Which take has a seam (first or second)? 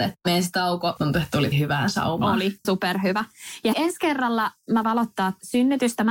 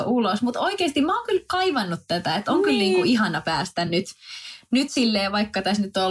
first